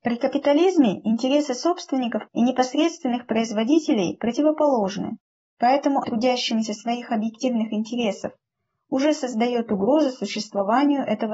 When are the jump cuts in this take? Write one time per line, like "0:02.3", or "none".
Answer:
0:02.3
0:06.0